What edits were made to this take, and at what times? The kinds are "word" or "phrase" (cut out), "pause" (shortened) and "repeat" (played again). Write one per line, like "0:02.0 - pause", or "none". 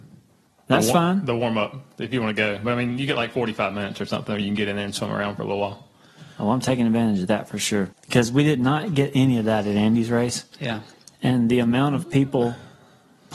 0:07.9 - pause
0:10.5 - pause